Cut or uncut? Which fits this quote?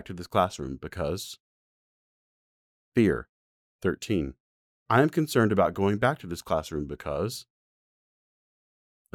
uncut